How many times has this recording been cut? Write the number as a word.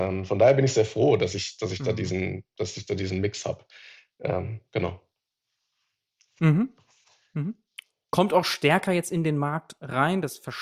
zero